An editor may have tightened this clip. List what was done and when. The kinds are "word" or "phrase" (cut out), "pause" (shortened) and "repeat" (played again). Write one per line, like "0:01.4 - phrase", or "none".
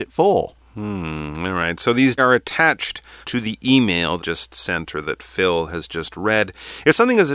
0:02.2 - phrase
0:03.2 - pause
0:04.2 - phrase